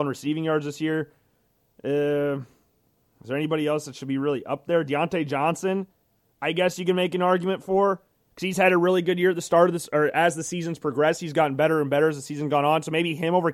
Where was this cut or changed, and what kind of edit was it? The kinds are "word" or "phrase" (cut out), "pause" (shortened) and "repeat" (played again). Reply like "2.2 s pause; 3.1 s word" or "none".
none